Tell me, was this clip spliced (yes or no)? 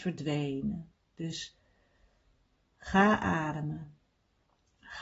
no